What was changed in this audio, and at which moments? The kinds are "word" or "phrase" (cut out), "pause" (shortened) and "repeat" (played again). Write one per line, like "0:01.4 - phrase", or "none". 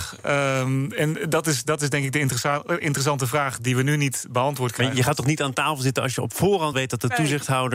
0:06.7 - word

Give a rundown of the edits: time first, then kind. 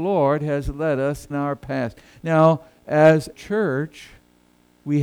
0:01.3 - word
0:03.3 - word

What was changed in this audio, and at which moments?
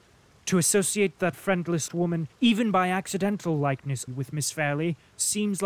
0:01.3 - word
0:01.9 - word
0:02.3 - pause
0:04.1 - word

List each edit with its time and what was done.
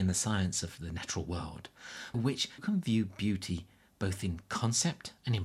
0:02.1 - word
0:02.6 - word

